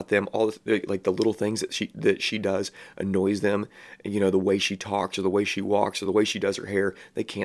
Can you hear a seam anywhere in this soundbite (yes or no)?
no